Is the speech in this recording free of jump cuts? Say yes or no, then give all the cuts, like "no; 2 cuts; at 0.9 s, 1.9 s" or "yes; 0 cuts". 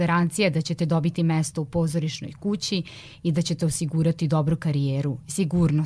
yes; 0 cuts